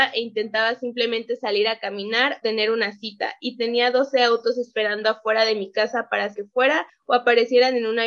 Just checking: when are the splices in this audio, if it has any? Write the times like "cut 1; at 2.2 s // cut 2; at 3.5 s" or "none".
cut 1; at 2.4 s // cut 2; at 6.3 s